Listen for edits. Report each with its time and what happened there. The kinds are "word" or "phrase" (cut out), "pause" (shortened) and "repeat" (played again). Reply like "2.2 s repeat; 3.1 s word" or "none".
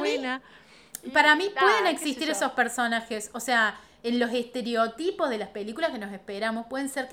none